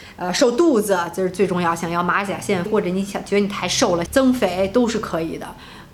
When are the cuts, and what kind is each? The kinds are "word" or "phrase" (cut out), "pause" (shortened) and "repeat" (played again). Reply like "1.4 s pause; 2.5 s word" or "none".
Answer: 2.7 s phrase; 4.1 s phrase

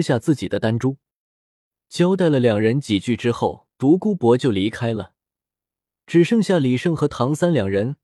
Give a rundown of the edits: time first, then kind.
3.7 s pause

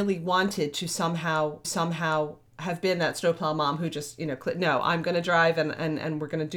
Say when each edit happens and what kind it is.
1.6 s repeat

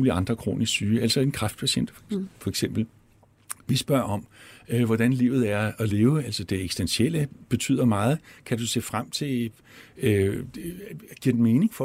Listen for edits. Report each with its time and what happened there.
none

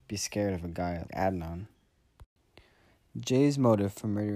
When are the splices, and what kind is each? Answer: 1.1 s word

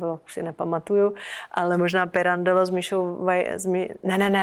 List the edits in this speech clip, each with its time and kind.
none

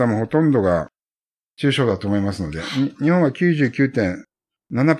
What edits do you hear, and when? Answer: none

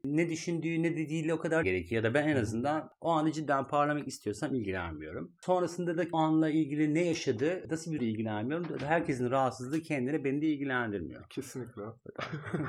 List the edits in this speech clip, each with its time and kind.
1.6 s word; 6.1 s phrase; 8.0 s phrase

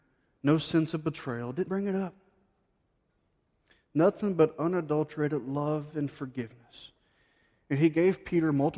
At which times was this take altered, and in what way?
1.7 s word

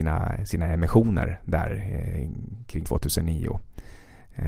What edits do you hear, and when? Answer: 2.8 s word

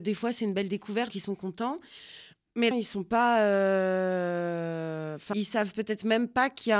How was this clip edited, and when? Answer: 1.1 s word; 2.7 s phrase; 5.3 s phrase

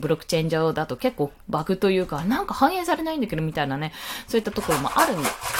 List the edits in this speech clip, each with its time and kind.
1.4 s pause

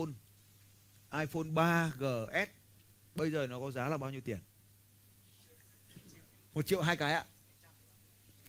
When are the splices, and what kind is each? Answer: none

